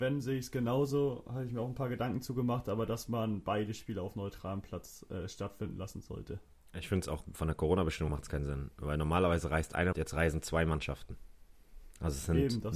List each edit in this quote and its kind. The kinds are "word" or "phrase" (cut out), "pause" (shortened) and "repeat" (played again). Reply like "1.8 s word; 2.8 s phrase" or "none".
7.3 s word; 8.1 s word; 9.9 s word